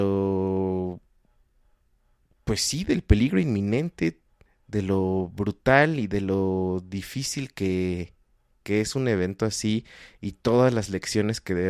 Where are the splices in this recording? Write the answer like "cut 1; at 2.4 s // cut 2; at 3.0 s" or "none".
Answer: cut 1; at 4.5 s